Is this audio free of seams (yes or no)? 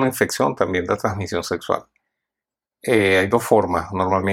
yes